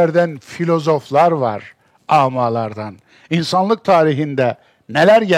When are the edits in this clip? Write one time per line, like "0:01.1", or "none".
none

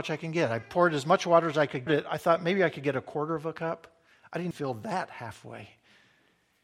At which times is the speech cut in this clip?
0:01.9
0:04.5

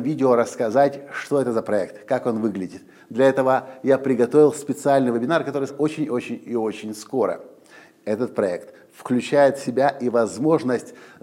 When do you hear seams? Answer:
0:05.7

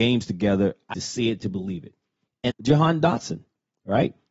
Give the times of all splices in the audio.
0:00.9
0:02.5

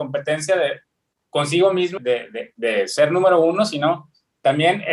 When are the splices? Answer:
0:02.0

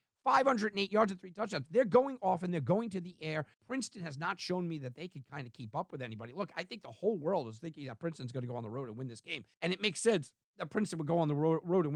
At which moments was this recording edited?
0:03.5
0:09.5

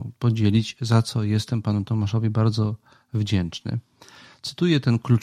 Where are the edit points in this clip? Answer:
none

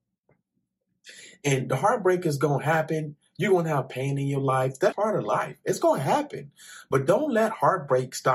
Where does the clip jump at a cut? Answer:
0:04.9

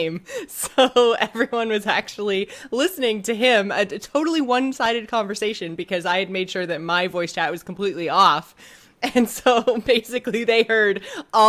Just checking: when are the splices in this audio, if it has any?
none

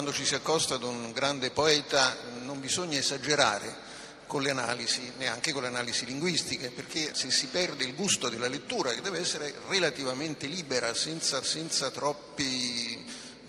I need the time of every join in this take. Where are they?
0:07.1
0:11.4

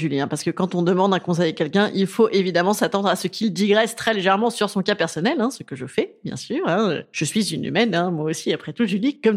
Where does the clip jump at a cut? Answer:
none

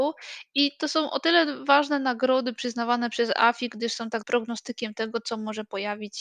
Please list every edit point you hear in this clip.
0:04.2

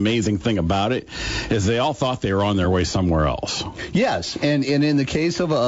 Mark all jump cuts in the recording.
none

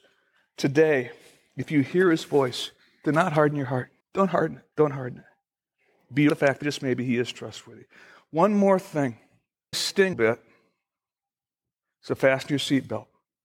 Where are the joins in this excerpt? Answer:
0:02.8
0:04.0
0:04.7
0:06.3
0:06.6
0:09.7
0:10.1

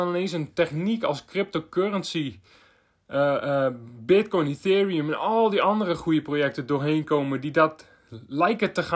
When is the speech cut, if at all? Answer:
none

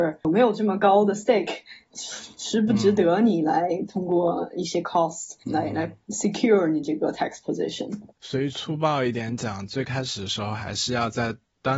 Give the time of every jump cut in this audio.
0:05.4
0:06.0
0:08.1

